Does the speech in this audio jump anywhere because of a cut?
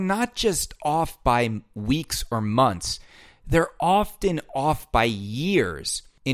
no; 0 cuts

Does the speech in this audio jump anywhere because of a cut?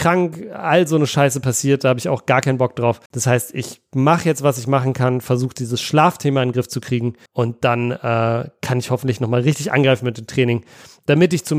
yes; 2 cuts; at 3.1 s, 7.3 s

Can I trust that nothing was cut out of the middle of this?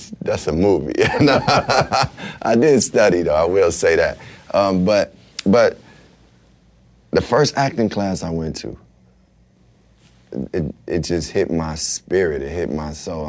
no; 1 cut; at 5.3 s

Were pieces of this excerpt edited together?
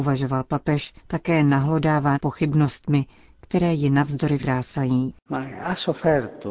yes; 3 cuts; at 1.0 s, 2.1 s, 4.4 s

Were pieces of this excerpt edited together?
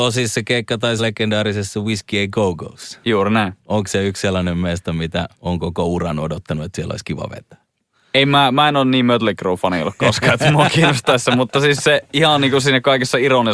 yes; 3 cuts; at 1.0 s, 3.6 s, 5.3 s

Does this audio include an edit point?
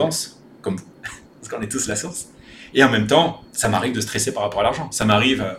yes; 1 cut; at 3.5 s

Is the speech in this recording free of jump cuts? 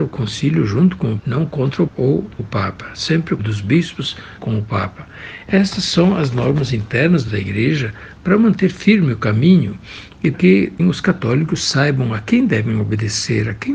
no; 8 cuts; at 1.2 s, 1.9 s, 2.4 s, 3.4 s, 4.4 s, 7.3 s, 10.3 s, 10.8 s

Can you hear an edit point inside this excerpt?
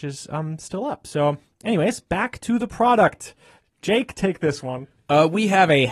no; 0 cuts

